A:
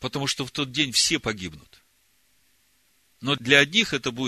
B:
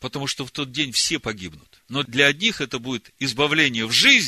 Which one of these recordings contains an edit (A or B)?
B